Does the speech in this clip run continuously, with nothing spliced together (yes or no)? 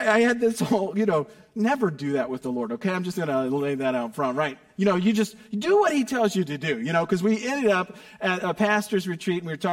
yes